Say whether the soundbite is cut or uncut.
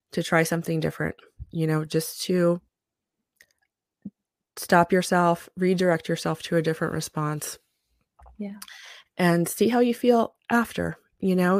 uncut